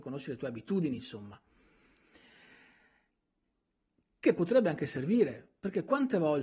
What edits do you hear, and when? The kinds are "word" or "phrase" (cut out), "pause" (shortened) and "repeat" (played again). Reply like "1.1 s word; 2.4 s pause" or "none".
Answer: none